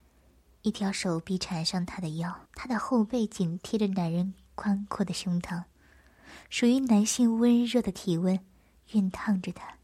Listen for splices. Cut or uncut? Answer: cut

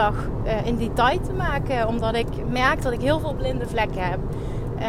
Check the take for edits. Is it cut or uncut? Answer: uncut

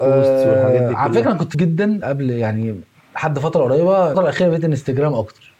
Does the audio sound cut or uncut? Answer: cut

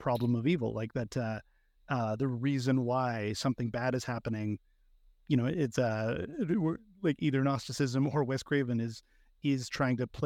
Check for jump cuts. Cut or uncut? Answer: uncut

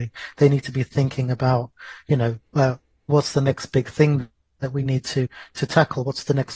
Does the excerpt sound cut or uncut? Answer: uncut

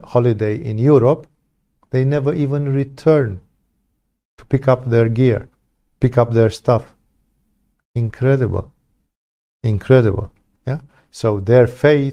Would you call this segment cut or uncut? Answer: uncut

